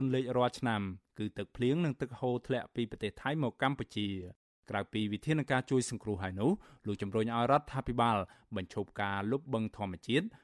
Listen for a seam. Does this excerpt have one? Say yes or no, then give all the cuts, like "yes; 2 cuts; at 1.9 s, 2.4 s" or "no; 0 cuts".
no; 0 cuts